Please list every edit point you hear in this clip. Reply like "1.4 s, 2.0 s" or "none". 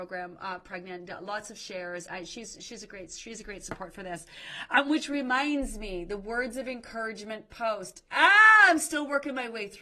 2.1 s